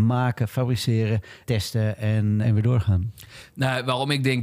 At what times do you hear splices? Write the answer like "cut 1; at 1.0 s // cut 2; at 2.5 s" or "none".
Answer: cut 1; at 1.4 s // cut 2; at 2.4 s